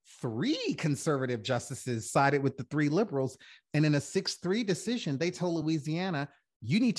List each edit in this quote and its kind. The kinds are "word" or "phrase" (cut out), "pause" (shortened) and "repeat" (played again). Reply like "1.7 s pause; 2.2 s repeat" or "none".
none